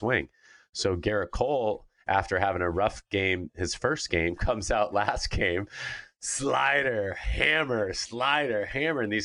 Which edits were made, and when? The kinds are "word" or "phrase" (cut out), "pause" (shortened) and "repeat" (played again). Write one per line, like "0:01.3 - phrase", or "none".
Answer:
none